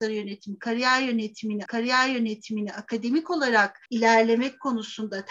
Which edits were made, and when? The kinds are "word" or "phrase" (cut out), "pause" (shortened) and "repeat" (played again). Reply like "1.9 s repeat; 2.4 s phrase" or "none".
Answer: 1.7 s repeat; 3.9 s pause